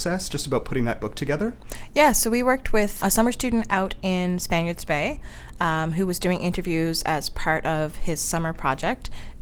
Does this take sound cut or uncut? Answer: cut